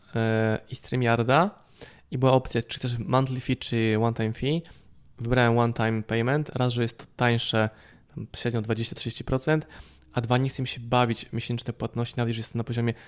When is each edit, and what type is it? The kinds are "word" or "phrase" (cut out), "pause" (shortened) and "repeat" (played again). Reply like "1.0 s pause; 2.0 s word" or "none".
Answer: none